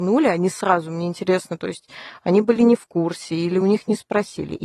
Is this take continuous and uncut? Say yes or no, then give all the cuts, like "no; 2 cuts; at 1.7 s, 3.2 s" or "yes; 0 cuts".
yes; 0 cuts